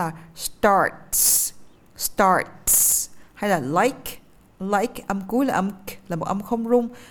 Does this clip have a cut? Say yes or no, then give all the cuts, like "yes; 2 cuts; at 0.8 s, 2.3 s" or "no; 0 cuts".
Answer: no; 0 cuts